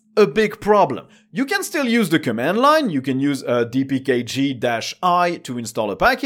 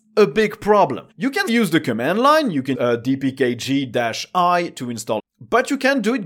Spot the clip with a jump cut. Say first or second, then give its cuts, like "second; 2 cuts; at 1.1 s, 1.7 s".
second; 4 cuts; at 1.1 s, 1.5 s, 2.7 s, 5.2 s